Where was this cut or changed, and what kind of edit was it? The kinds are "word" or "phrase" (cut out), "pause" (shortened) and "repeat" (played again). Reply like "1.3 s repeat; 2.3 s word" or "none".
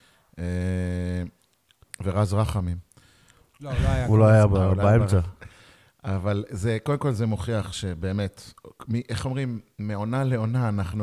none